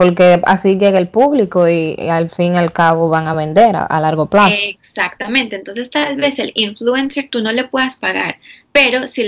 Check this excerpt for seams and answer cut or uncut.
uncut